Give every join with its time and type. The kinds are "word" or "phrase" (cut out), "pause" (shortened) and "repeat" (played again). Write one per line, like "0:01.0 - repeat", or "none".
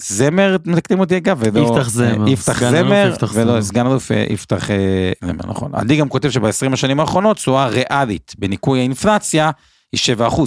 none

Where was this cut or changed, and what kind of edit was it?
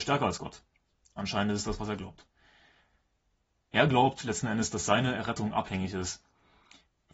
none

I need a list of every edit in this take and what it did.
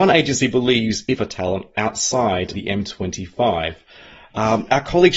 0:01.1 - phrase
0:02.5 - word

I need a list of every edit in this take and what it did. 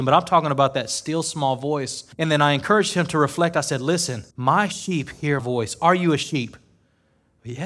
0:02.1 - pause
0:04.3 - pause
0:05.4 - word

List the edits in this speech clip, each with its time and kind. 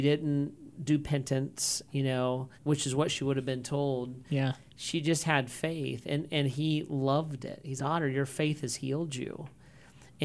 0:02.5 - pause
0:07.8 - word

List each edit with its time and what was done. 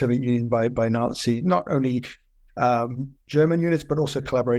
none

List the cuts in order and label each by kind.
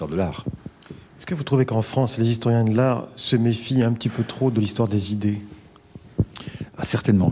0:01.1 - pause

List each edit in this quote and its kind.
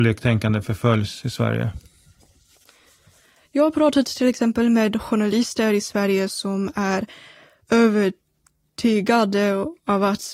none

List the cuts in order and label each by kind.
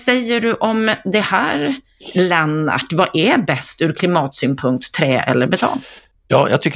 none

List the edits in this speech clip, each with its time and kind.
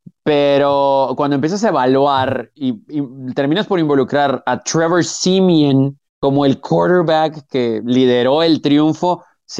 0:06.1 - pause

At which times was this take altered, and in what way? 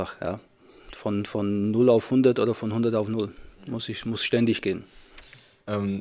0:03.6 - pause

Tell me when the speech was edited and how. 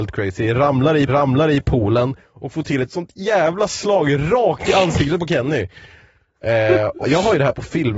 0:01.1 - repeat
0:07.0 - word

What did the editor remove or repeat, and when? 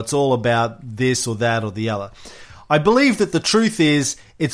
none

